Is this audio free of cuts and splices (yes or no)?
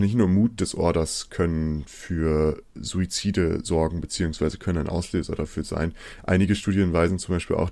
yes